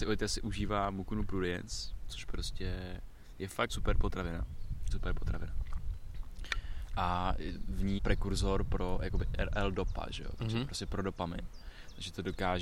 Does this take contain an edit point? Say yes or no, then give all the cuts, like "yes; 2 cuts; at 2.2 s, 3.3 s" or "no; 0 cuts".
yes; 3 cuts; at 3.7 s, 4.9 s, 8.0 s